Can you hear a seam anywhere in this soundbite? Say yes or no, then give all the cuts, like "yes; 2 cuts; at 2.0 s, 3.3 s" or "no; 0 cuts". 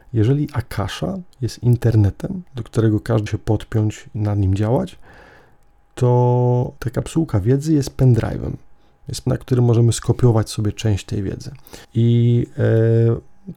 yes; 6 cuts; at 1.3 s, 3.3 s, 4.1 s, 6.8 s, 9.3 s, 11.8 s